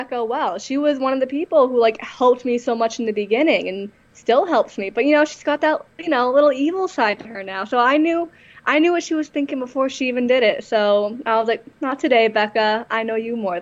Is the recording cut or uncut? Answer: uncut